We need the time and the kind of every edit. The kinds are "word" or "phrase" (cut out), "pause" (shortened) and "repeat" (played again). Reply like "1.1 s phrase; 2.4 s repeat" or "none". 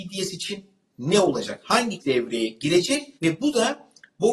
2.0 s word; 3.2 s pause